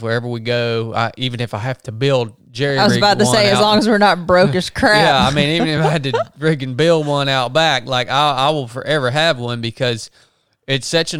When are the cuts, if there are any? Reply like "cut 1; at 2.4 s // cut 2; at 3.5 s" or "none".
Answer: none